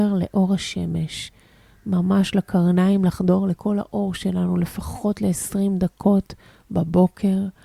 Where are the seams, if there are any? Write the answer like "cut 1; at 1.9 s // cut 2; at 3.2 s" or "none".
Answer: none